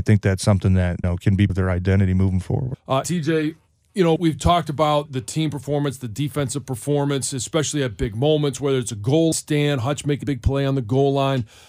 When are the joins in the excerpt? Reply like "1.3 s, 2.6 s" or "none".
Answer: 1.0 s, 1.5 s, 3.0 s, 4.2 s, 5.1 s, 9.3 s, 10.2 s